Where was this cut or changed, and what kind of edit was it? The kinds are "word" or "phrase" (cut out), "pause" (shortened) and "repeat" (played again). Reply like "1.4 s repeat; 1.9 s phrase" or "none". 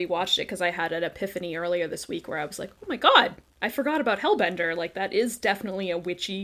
none